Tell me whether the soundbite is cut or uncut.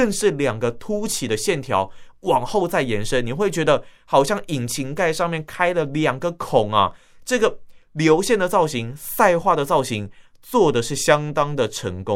uncut